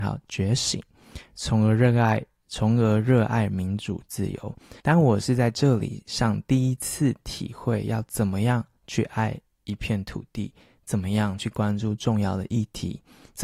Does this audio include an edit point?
yes; 1 cut; at 4.8 s

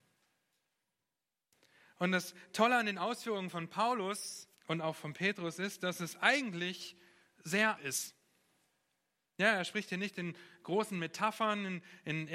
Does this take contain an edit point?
yes; 2 cuts; at 4.6 s, 7.8 s

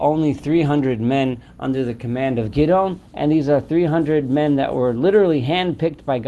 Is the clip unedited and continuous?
no; 1 cut; at 3.1 s

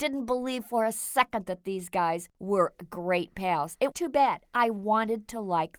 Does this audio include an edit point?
yes; 1 cut; at 3.9 s

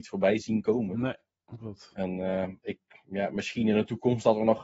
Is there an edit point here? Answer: no; 0 cuts

